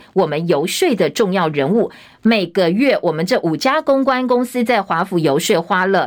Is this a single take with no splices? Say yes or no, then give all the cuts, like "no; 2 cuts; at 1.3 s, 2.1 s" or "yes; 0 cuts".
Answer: yes; 0 cuts